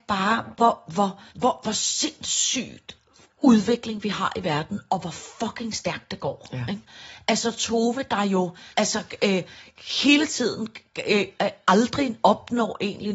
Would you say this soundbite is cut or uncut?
cut